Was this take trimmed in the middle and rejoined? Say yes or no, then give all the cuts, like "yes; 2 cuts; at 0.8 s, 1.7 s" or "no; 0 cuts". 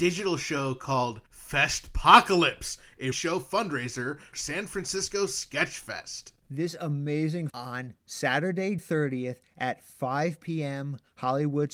yes; 5 cuts; at 1.3 s, 3.1 s, 4.3 s, 7.5 s, 8.8 s